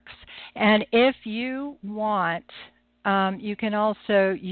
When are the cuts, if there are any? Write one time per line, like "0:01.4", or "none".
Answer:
none